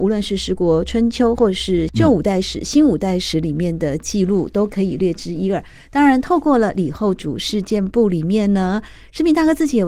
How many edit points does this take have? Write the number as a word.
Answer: zero